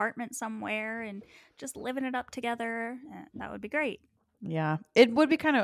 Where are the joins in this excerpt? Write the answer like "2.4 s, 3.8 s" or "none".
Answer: none